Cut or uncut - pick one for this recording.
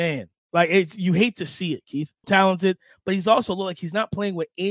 cut